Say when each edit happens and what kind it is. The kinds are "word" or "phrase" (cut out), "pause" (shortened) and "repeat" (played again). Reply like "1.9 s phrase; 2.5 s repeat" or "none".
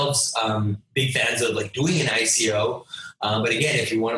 none